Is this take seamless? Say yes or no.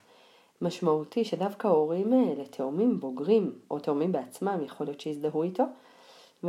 no